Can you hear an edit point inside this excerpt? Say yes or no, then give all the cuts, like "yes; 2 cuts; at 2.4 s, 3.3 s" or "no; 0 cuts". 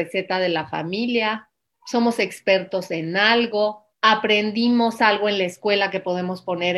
yes; 2 cuts; at 1.7 s, 3.9 s